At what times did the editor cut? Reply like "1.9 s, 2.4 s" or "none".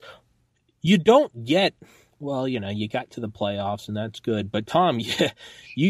none